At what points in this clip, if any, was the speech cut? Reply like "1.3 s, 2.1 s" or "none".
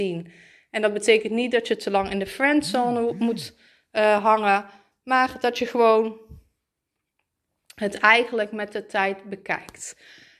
none